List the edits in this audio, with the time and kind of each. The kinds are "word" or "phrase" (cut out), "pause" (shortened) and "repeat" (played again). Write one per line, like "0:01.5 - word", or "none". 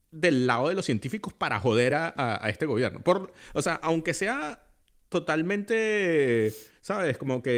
none